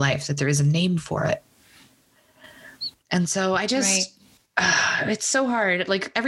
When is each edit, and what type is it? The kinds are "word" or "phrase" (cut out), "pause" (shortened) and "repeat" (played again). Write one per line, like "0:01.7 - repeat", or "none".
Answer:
none